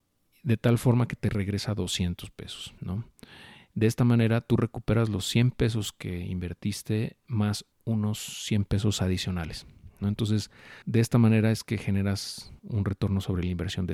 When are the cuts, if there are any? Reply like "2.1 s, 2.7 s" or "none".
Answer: 2.8 s, 7.7 s, 10.8 s, 12.6 s